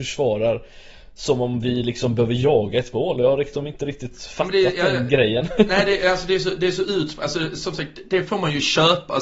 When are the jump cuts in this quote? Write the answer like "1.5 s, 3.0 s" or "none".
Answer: none